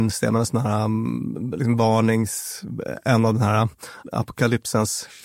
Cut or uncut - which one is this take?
uncut